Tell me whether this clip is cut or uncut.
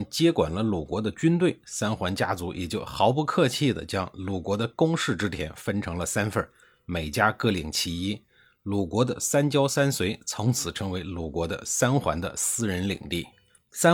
uncut